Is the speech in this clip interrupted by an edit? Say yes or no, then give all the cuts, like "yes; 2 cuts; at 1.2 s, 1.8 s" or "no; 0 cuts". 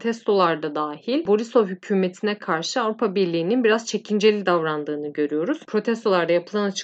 no; 0 cuts